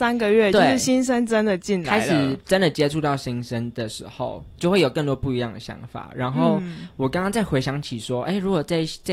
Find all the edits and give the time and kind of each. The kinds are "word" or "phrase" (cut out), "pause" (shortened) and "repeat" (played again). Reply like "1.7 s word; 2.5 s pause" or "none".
4.6 s word